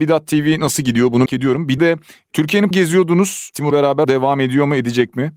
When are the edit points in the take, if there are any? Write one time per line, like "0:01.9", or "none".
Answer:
0:01.3
0:01.8
0:02.7
0:03.7
0:04.0

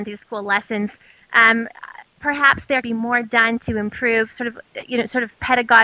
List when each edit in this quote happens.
0:02.8

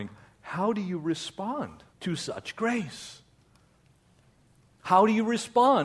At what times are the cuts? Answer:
0:01.9

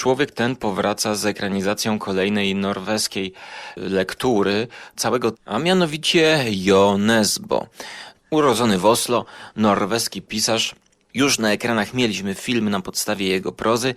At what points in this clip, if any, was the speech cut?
0:05.0
0:05.3
0:08.1

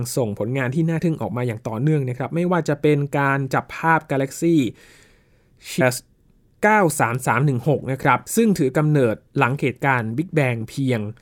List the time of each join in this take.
0:05.8
0:08.3

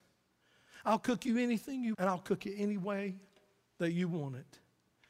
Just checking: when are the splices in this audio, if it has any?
0:01.9

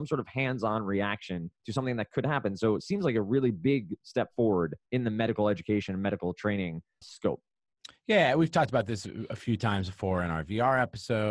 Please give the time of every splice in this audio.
0:01.6
0:04.9
0:07.0

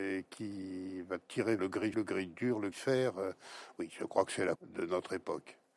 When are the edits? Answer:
0:01.6
0:01.9
0:02.7
0:04.6

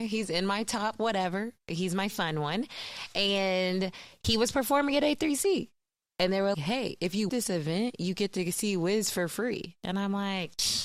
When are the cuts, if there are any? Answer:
0:06.5
0:07.3

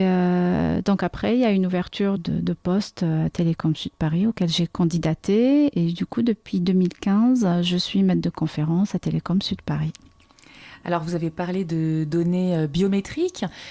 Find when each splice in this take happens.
0:02.2

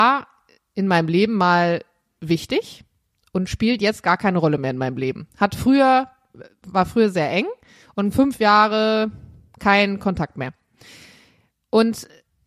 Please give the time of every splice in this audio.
none

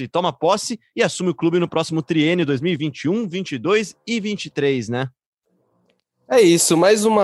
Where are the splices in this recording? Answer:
none

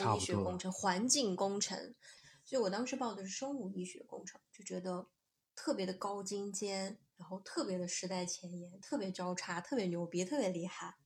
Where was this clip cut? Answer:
0:07.1

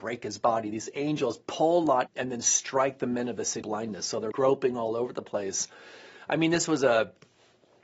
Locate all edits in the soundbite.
0:02.1
0:03.6
0:04.3

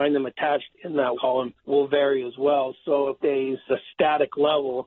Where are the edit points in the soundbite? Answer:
0:01.1
0:01.6
0:03.2
0:03.7

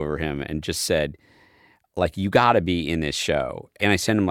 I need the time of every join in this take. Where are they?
none

